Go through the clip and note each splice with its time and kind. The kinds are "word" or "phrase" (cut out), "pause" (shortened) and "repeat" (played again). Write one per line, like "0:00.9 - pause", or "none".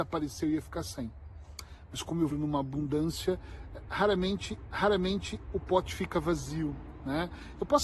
0:02.3 - word
0:04.6 - repeat

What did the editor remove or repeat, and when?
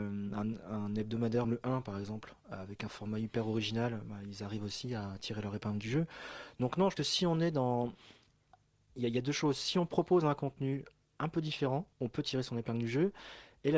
0:01.4 - phrase
0:02.4 - pause
0:07.0 - word
0:11.9 - pause

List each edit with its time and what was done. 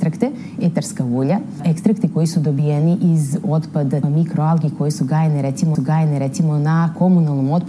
0:04.0 - word
0:05.7 - repeat

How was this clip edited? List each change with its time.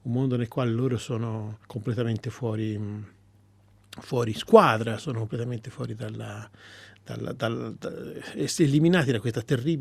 0:01.6 - pause

